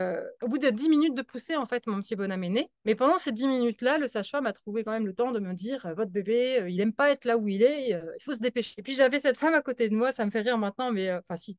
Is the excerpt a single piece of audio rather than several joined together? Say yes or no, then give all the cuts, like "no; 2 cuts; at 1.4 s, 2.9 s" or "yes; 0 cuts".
yes; 0 cuts